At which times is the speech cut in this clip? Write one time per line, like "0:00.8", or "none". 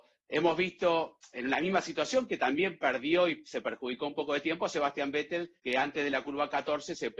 0:05.6